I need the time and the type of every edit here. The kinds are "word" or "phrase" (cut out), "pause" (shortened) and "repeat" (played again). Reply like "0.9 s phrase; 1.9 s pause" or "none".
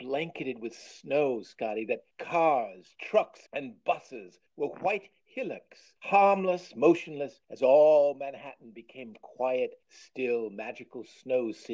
2.1 s pause; 3.5 s pause; 4.5 s pause; 6.0 s pause; 7.4 s pause; 9.8 s pause